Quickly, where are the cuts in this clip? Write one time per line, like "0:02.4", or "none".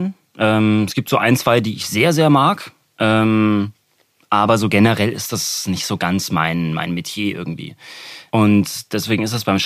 none

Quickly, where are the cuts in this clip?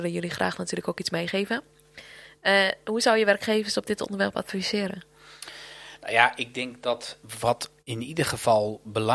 0:07.8

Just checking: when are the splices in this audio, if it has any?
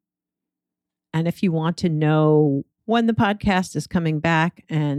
0:02.7

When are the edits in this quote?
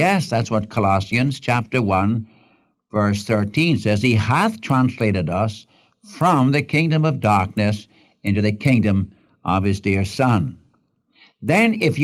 none

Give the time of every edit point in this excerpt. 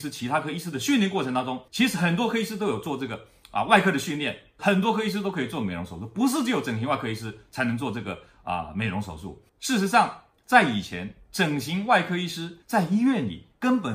0:01.7
0:09.5
0:12.6

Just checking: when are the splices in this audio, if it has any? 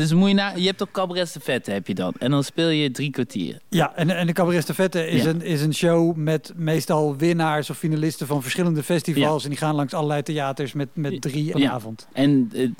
0:11.5

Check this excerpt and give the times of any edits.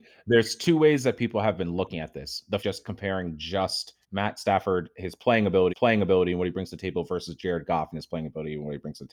0:02.6
0:04.0
0:05.7

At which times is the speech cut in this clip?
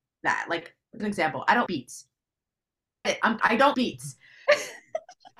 0:01.0
0:01.7
0:03.0
0:03.4
0:03.7

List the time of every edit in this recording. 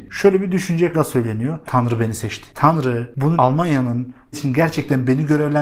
0:00.9
0:01.6
0:03.4
0:04.3

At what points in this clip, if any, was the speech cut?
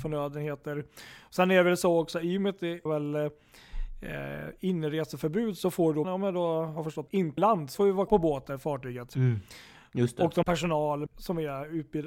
0:02.9
0:06.0
0:07.1
0:07.4
0:07.7
0:08.1
0:10.4
0:11.1

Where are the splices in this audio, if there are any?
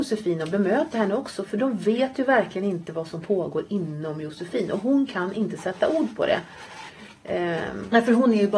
none

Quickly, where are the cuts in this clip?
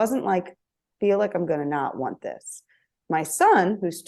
0:00.9

